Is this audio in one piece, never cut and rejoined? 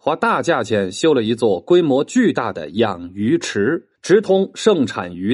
no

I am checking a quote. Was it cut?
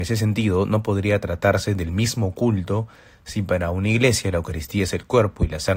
no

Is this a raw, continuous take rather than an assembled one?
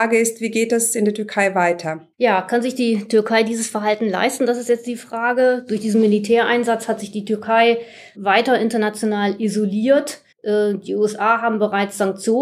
no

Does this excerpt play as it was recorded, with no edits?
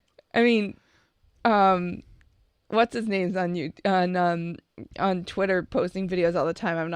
yes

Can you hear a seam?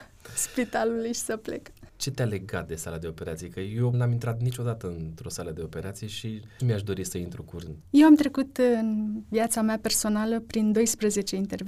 yes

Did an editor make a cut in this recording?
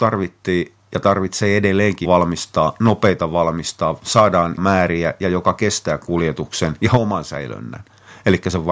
yes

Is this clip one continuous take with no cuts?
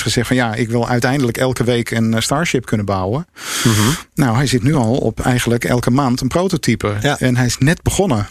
yes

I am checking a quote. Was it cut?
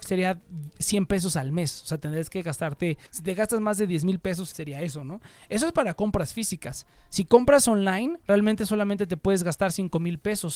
yes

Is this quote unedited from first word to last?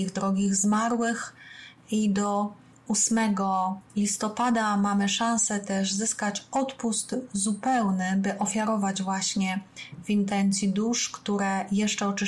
no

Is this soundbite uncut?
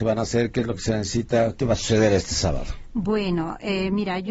yes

